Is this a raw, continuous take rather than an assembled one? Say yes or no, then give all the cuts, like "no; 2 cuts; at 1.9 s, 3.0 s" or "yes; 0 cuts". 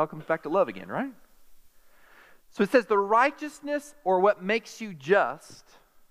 yes; 0 cuts